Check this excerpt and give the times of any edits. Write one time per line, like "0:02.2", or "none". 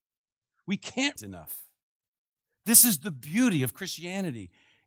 0:01.2